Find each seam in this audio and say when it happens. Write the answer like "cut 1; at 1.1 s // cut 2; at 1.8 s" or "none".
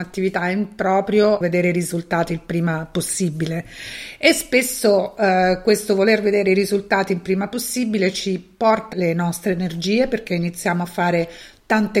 cut 1; at 1.4 s // cut 2; at 8.9 s